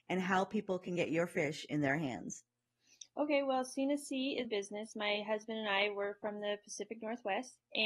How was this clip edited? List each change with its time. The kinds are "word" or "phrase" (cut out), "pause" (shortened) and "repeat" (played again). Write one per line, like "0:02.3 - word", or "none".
0:04.4 - phrase